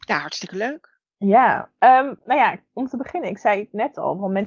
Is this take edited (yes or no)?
no